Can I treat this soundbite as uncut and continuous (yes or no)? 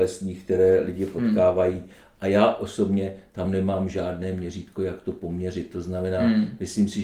yes